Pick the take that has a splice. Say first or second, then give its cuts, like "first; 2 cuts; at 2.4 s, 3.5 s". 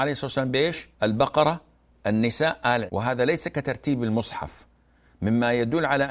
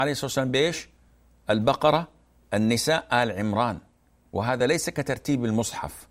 first; 2 cuts; at 0.9 s, 2.9 s